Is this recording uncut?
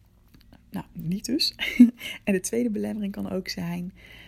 yes; 0 cuts

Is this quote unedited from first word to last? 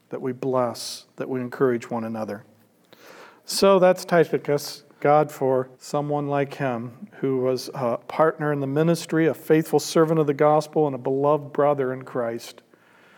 no; 3 cuts; at 5.0 s, 5.7 s, 8.0 s

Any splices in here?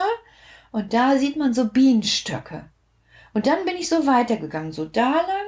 no; 0 cuts

